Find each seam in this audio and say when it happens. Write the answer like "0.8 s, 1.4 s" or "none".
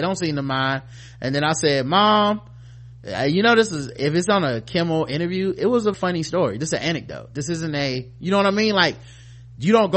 5.9 s